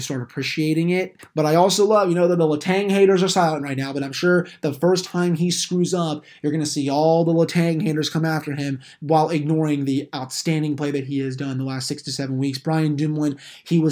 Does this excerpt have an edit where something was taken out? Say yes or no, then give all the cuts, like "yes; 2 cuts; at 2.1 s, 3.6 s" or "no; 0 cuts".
no; 0 cuts